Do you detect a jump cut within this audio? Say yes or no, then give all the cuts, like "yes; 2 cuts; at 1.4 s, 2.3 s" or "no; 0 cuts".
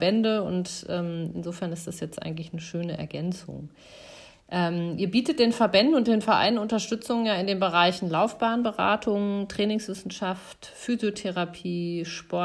no; 0 cuts